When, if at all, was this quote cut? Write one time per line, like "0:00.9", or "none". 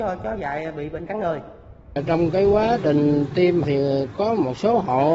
0:01.1
0:03.6